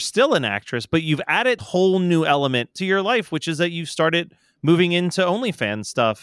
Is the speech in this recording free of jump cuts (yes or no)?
no